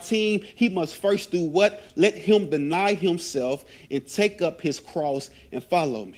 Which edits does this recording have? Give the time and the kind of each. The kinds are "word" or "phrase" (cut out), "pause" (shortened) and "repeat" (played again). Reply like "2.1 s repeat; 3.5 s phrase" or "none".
none